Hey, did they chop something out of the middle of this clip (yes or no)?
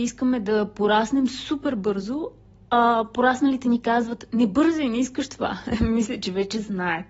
no